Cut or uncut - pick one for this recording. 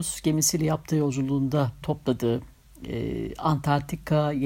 cut